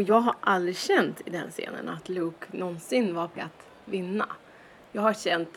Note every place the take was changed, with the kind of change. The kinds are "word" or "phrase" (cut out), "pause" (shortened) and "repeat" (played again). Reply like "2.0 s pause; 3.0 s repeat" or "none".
3.4 s word